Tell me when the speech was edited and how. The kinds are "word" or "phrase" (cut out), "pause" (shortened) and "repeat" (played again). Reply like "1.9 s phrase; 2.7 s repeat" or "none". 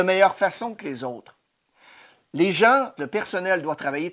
3.0 s phrase

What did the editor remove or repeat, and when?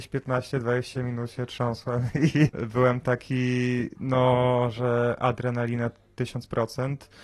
2.5 s word

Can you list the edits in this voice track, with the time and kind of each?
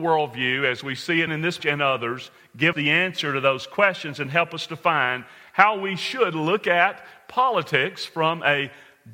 1.3 s word; 1.6 s word; 2.7 s word

